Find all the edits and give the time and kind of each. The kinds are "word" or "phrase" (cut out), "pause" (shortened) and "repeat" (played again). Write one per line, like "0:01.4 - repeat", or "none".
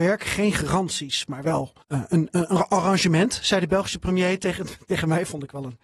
0:01.8 - pause